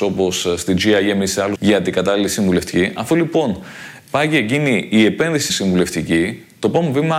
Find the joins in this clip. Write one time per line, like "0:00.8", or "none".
0:01.6
0:05.5